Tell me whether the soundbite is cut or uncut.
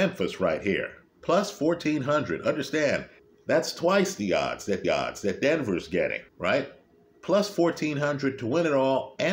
cut